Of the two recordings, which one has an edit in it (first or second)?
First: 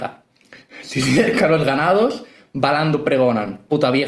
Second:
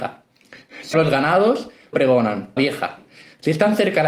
second